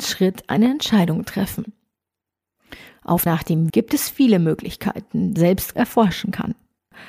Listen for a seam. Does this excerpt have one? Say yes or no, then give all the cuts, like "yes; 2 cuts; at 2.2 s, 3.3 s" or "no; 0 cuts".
yes; 4 cuts; at 3.3 s, 3.7 s, 5.4 s, 5.7 s